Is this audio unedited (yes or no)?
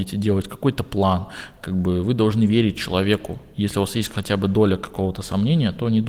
no